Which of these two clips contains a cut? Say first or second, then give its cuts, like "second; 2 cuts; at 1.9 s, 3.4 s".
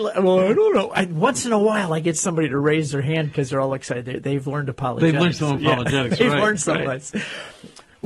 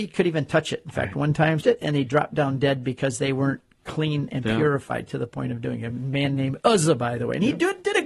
second; 1 cut; at 1.6 s